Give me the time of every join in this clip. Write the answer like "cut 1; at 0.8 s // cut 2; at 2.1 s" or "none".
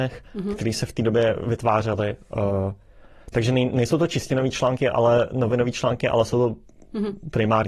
none